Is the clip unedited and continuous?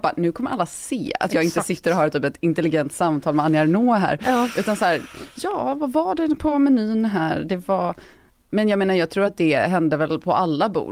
yes; 0 cuts

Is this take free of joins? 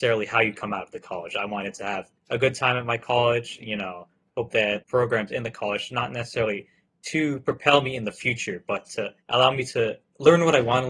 no; 3 cuts; at 2.2 s, 4.8 s, 9.2 s

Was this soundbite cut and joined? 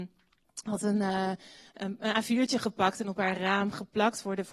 no; 0 cuts

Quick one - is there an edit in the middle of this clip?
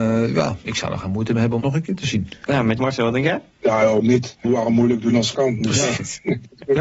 yes; 5 cuts; at 1.6 s, 2.8 s, 4.0 s, 4.4 s, 5.3 s

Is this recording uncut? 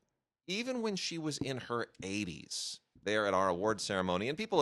yes; 0 cuts

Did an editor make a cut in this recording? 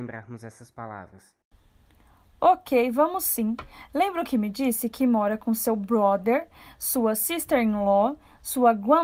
no; 0 cuts

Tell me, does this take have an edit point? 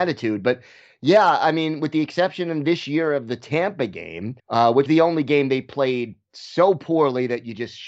yes; 2 cuts; at 4.4 s, 4.9 s

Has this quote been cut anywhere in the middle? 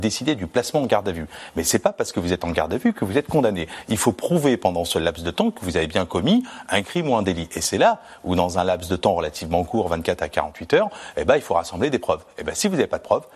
no; 0 cuts

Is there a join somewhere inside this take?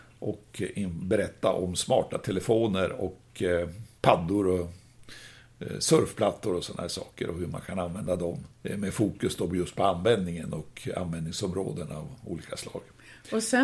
yes; 2 cuts; at 4.0 s, 8.5 s

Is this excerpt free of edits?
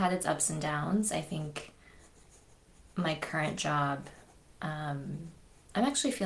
yes; 0 cuts

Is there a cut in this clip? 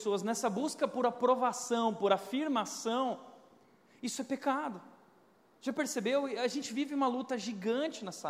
no; 0 cuts

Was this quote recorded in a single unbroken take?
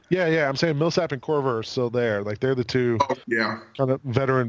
no; 1 cut; at 3.2 s

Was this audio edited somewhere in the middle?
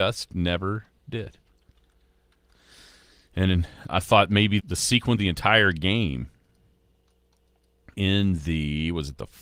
yes; 4 cuts; at 3.9 s, 4.6 s, 5.2 s, 7.9 s

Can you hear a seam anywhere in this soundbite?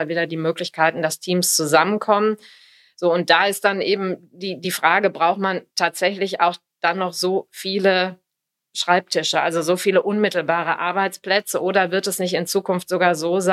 no; 0 cuts

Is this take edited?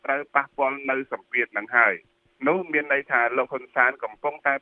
no; 0 cuts

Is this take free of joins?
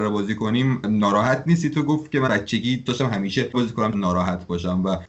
no; 4 cuts; at 2.3 s, 2.9 s, 3.5 s, 3.9 s

